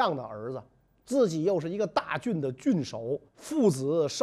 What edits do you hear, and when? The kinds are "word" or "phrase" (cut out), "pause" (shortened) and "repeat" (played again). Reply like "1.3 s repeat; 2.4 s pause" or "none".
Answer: 3.3 s pause